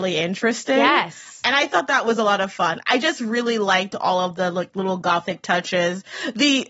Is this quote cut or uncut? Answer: uncut